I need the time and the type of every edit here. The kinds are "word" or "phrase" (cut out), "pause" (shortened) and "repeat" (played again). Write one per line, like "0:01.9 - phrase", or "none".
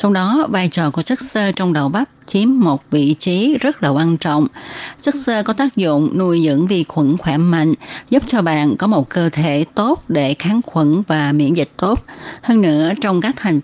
none